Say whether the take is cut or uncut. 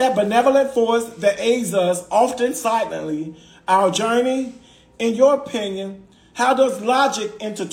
uncut